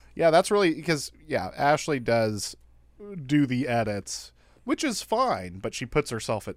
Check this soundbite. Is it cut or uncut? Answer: uncut